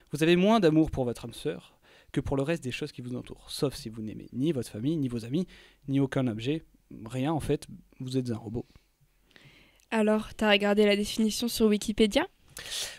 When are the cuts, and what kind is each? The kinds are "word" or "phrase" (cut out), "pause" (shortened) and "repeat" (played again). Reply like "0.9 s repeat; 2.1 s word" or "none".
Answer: none